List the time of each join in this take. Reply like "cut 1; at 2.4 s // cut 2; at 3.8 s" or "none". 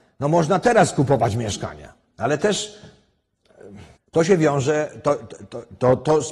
cut 1; at 4.0 s